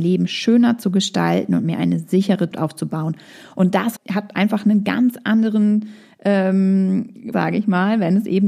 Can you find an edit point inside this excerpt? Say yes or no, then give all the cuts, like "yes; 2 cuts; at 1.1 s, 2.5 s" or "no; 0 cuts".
yes; 3 cuts; at 2.5 s, 4.0 s, 7.3 s